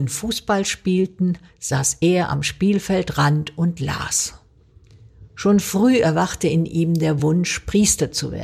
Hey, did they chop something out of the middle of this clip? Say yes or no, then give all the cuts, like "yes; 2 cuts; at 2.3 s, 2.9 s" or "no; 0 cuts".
no; 0 cuts